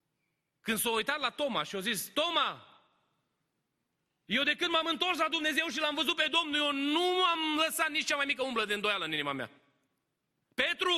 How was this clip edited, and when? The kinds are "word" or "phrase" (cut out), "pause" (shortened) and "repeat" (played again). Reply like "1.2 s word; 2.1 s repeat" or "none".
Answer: none